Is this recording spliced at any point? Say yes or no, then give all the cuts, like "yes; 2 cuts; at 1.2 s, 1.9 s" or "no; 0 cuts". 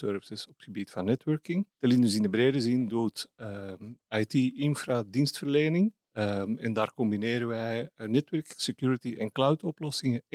yes; 2 cuts; at 1.7 s, 6.0 s